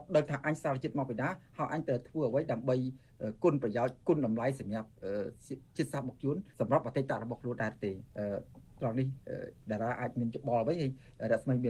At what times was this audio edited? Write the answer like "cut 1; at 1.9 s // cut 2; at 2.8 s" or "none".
cut 1; at 4.0 s // cut 2; at 6.5 s